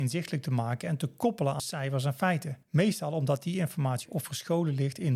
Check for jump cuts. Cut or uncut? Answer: cut